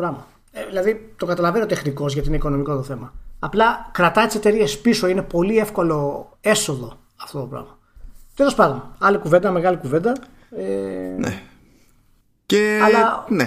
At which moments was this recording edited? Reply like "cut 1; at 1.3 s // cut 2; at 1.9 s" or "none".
cut 1; at 6.3 s